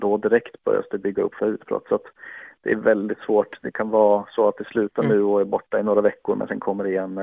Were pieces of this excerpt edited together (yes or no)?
yes